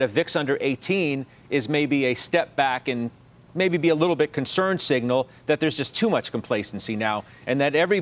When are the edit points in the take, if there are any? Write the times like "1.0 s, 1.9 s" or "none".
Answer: none